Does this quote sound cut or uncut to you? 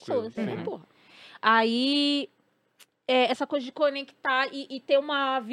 uncut